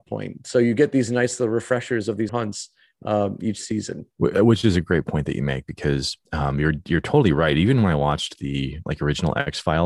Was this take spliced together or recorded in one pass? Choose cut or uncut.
cut